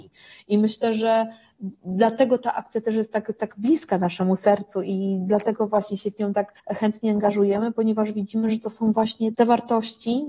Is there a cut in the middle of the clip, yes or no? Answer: yes